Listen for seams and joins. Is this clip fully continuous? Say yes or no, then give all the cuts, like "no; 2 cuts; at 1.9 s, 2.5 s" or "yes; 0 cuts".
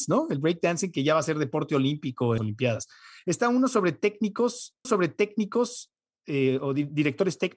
no; 2 cuts; at 2.4 s, 4.8 s